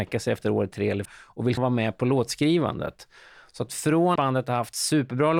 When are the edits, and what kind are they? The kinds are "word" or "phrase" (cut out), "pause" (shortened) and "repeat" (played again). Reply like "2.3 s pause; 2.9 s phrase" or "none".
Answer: 1.0 s word; 1.6 s word; 4.2 s word